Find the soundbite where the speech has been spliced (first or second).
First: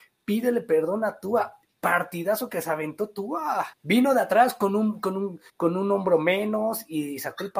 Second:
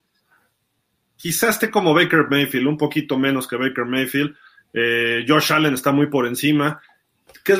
first